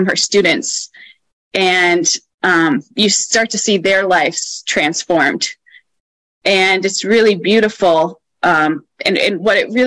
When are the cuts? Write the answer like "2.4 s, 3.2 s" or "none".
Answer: none